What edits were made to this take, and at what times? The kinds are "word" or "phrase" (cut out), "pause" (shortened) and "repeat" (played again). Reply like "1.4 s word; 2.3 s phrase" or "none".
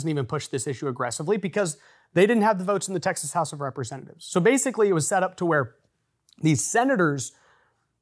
none